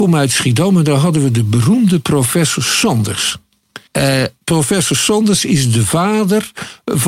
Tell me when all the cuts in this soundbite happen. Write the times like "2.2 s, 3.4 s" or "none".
3.9 s